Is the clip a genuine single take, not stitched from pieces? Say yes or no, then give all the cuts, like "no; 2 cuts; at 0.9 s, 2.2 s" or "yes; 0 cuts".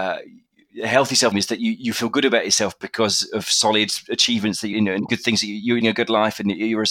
no; 3 cuts; at 1.3 s, 4.7 s, 5.8 s